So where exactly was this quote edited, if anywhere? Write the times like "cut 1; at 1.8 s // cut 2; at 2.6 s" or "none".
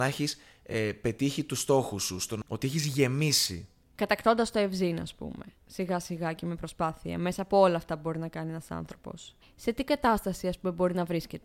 cut 1; at 2.4 s